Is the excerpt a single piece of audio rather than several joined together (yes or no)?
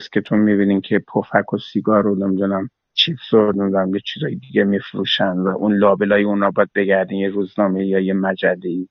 no